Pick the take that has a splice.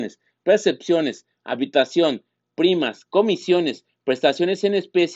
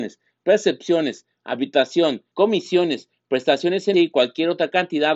second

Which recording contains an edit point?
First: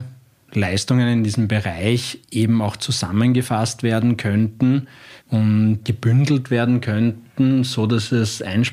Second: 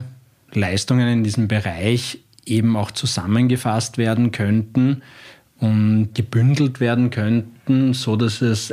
first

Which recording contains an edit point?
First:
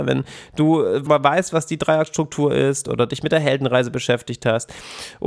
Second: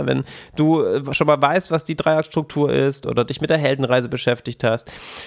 first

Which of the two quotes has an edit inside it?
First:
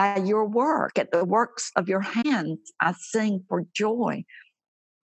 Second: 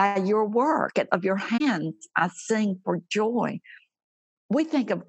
second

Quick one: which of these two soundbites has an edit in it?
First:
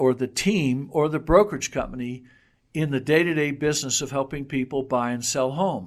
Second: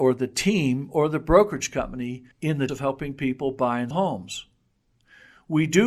second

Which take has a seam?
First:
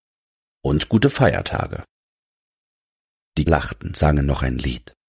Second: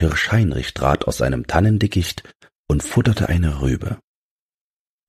first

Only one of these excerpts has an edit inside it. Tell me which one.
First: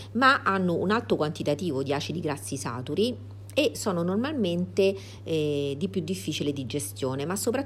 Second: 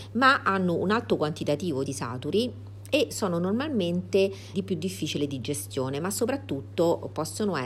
second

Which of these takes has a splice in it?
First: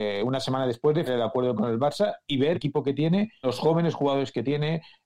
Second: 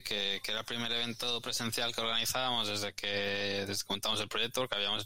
first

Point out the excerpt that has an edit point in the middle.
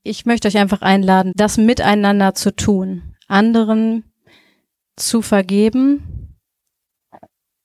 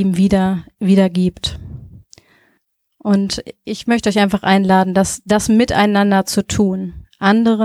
first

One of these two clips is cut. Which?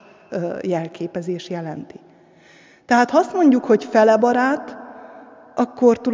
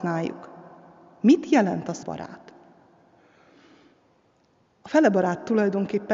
second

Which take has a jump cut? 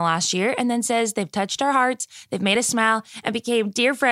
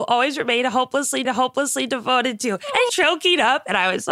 second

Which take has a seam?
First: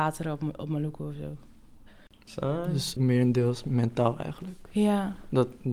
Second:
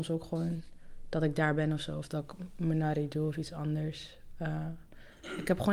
first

